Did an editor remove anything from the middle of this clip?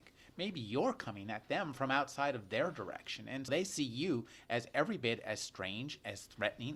yes; 1 cut; at 3.5 s

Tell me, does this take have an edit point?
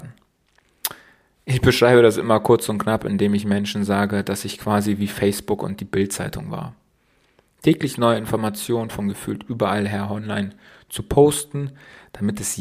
no; 0 cuts

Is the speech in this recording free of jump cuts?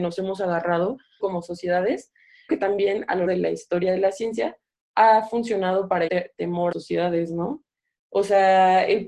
no; 5 cuts; at 1.2 s, 2.5 s, 3.3 s, 6.1 s, 6.7 s

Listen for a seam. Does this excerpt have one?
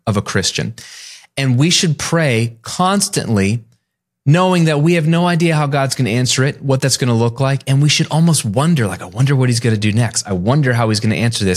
no; 0 cuts

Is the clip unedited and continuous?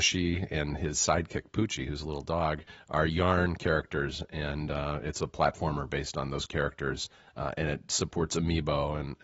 yes; 0 cuts

